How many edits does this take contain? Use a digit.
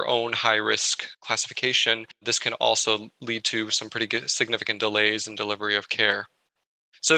1